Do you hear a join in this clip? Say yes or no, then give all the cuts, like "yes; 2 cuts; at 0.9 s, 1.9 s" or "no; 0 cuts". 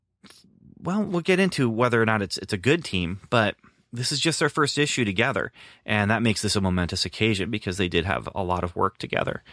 yes; 1 cut; at 1.1 s